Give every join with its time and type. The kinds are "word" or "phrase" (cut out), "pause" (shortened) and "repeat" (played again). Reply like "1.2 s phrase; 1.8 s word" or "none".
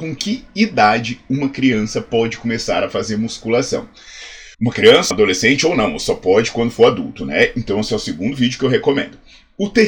4.5 s pause; 5.1 s word